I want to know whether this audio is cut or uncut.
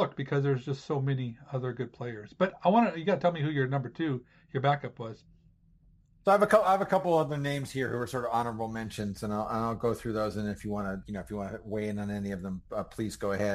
cut